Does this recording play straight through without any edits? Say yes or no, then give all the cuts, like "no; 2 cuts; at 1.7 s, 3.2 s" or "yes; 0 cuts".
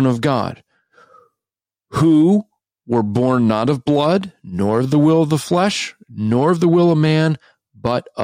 yes; 0 cuts